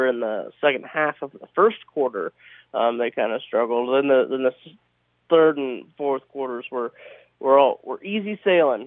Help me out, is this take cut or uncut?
uncut